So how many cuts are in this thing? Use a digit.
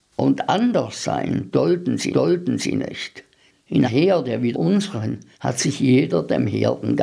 4